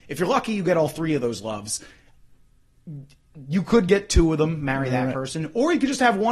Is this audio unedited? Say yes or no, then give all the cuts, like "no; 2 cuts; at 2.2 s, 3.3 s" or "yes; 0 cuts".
yes; 0 cuts